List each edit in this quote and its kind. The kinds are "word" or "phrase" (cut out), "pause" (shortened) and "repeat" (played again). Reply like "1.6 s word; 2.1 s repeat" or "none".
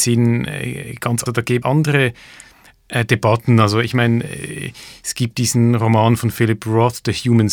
1.3 s word; 1.6 s word

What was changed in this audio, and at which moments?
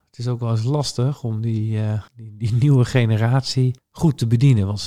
2.1 s pause; 3.8 s pause

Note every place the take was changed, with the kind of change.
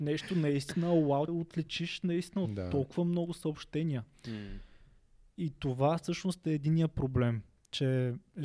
1.3 s phrase

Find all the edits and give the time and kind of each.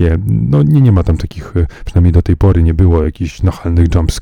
none

